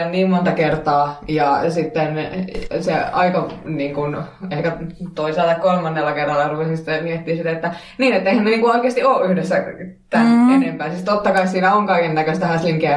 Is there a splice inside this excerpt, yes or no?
no